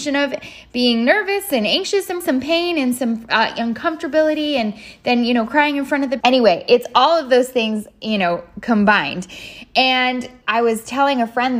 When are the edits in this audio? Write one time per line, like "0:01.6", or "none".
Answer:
0:02.2
0:06.2
0:10.4